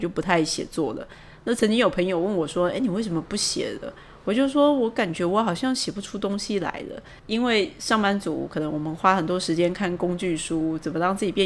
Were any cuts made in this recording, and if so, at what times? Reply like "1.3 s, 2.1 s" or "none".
7.2 s